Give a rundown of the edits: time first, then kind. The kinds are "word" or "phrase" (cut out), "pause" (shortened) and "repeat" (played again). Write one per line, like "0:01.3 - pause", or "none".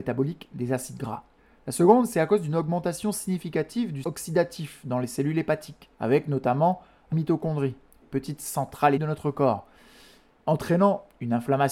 0:01.4 - pause
0:04.0 - word
0:05.9 - pause
0:07.1 - phrase
0:08.0 - phrase
0:09.0 - word